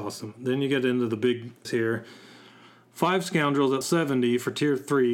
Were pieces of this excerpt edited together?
yes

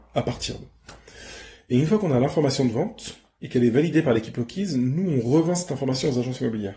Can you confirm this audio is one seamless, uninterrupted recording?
yes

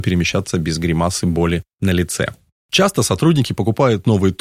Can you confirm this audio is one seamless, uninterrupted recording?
yes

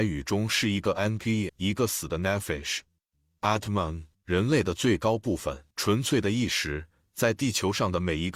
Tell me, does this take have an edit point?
yes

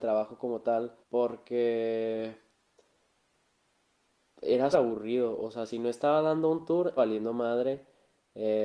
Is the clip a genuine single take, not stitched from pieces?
no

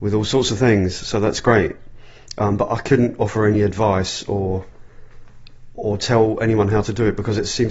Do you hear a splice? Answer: no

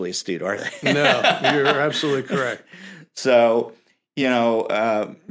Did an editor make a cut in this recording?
no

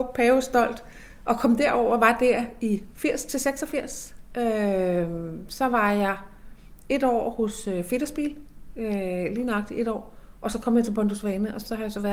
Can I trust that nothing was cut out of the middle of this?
no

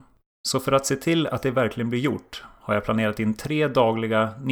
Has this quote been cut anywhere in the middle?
no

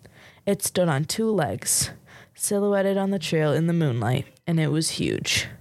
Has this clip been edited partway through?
no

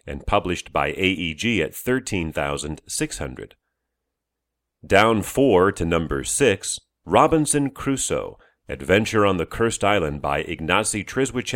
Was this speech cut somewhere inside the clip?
no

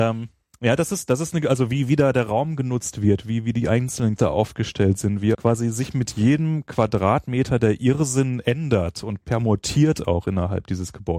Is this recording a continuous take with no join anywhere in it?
no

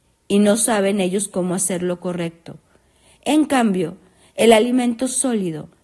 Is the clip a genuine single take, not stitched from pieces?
yes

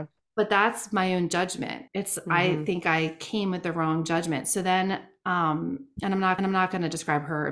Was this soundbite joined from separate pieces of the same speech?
yes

